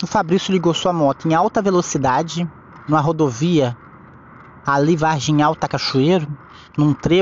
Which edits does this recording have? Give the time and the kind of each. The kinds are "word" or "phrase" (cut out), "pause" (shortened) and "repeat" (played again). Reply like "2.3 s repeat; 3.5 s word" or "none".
none